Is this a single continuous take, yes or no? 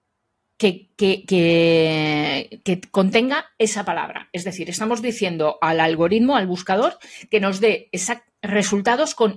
yes